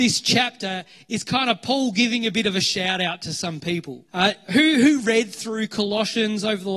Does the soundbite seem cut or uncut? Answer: cut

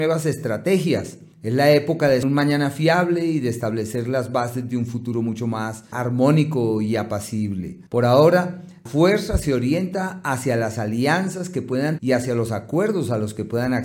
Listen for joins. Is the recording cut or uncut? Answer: cut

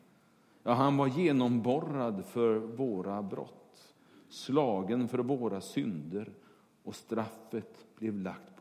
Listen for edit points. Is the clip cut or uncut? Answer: uncut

